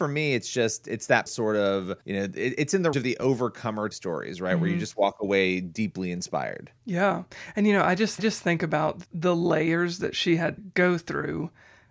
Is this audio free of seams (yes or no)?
no